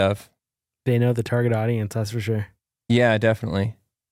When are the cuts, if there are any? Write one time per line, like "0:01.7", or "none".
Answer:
none